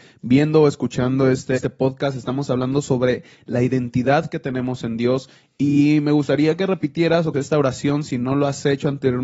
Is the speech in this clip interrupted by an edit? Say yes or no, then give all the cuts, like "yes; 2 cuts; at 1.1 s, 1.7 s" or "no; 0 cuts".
yes; 2 cuts; at 1.5 s, 7.3 s